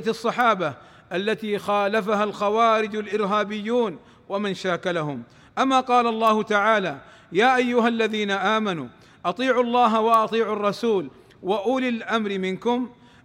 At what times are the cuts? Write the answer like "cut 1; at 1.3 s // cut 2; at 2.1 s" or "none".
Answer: none